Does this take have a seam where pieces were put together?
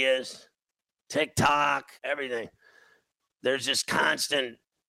yes; 1 cut; at 2.0 s

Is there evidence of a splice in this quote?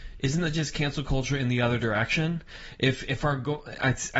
no; 0 cuts

